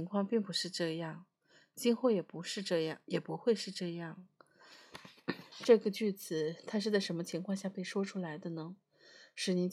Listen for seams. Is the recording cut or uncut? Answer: uncut